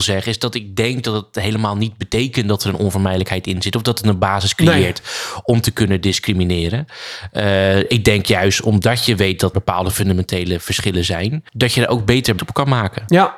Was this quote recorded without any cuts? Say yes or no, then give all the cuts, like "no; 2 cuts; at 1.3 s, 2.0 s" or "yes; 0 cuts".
no; 2 cuts; at 9.5 s, 12.4 s